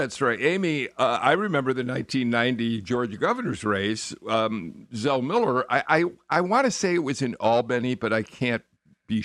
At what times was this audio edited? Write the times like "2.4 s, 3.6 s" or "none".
none